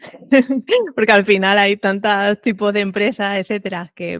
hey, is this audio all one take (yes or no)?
yes